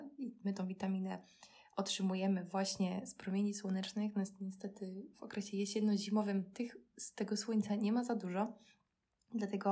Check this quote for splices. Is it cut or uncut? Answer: uncut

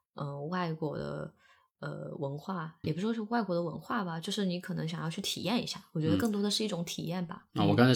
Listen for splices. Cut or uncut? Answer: cut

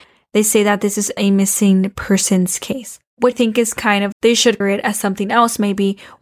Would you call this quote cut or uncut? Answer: cut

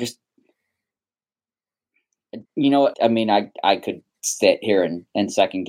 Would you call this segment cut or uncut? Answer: cut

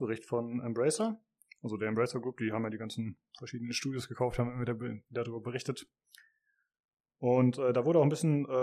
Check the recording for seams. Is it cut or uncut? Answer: uncut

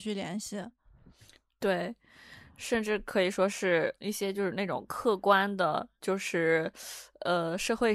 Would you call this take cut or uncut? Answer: cut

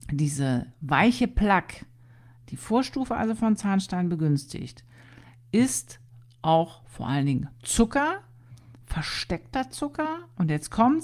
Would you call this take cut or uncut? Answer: uncut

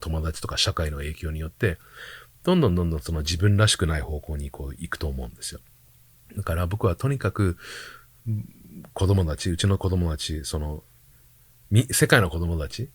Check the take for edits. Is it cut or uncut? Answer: uncut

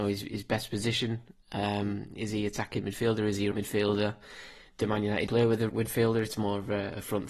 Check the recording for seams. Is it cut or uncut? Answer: cut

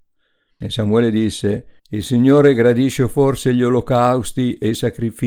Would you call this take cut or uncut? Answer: cut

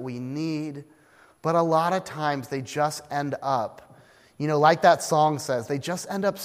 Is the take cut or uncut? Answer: uncut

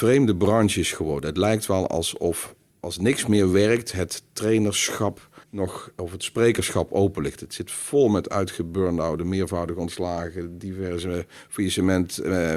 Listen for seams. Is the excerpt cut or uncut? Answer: cut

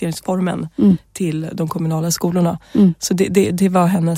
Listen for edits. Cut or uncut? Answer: uncut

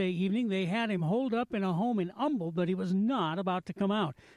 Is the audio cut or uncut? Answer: uncut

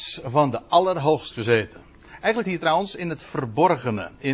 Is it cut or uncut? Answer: cut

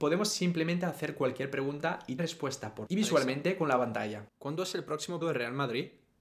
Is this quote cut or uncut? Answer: cut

